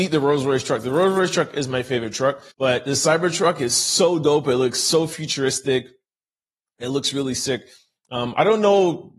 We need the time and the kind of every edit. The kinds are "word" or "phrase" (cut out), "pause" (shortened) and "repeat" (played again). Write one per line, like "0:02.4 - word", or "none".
0:02.5 - pause